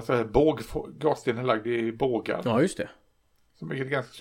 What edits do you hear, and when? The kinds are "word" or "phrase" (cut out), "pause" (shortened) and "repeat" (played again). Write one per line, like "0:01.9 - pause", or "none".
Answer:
none